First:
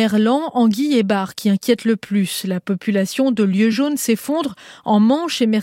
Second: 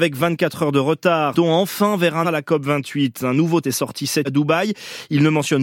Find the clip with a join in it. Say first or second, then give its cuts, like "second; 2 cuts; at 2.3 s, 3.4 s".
second; 4 cuts; at 1.3 s, 2.2 s, 3.6 s, 4.2 s